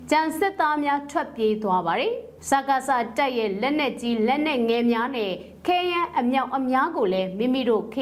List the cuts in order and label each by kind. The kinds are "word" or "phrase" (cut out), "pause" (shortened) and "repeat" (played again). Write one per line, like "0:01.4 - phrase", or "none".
0:02.4 - pause